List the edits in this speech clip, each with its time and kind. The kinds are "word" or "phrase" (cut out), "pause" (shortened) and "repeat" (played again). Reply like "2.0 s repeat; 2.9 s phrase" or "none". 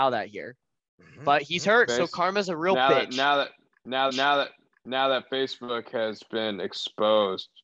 1.9 s word; 4.1 s repeat